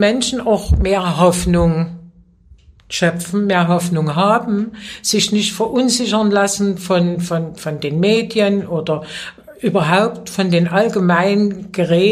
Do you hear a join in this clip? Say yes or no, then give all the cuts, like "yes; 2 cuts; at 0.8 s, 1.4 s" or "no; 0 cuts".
no; 0 cuts